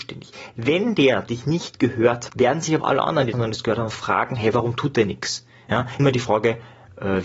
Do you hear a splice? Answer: yes; 5 cuts; at 1.3 s, 2.3 s, 2.8 s, 3.3 s, 6.0 s

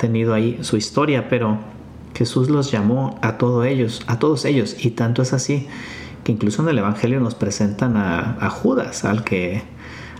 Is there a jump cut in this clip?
no; 0 cuts

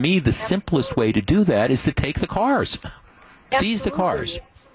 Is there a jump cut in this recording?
no; 0 cuts

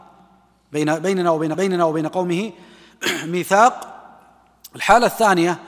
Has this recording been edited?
yes; 1 cut; at 1.5 s

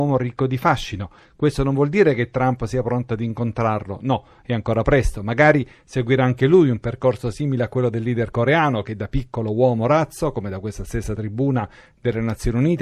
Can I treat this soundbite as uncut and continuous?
yes; 0 cuts

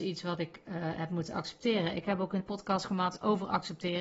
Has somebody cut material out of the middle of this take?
yes; 1 cut; at 2.4 s

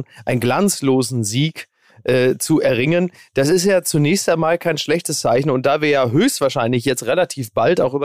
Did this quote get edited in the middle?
no; 0 cuts

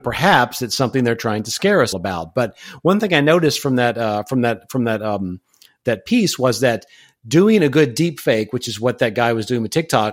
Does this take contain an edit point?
yes; 1 cut; at 1.9 s

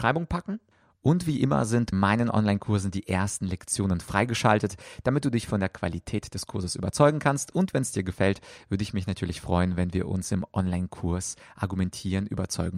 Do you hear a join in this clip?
yes; 1 cut; at 1.9 s

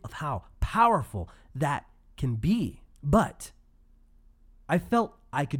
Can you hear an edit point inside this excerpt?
yes; 1 cut; at 2.9 s

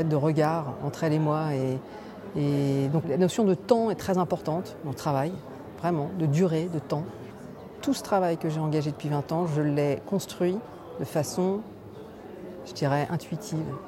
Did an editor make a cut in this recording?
yes; 2 cuts; at 3.0 s, 5.0 s

